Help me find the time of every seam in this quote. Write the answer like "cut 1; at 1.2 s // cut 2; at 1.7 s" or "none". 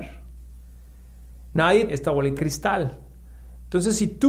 cut 1; at 1.9 s // cut 2; at 2.4 s